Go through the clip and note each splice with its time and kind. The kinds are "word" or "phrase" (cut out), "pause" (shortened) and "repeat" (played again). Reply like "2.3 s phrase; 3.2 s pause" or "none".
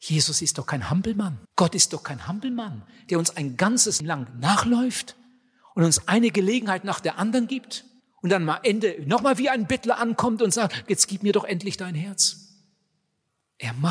1.4 s pause; 4.0 s word; 8.0 s pause

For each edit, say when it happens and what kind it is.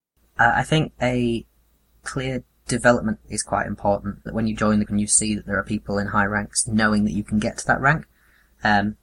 3.2 s word; 4.3 s word; 4.8 s word; 6.7 s word

